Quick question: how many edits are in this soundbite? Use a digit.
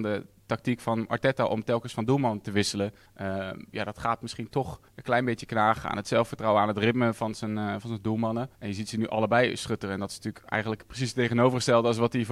3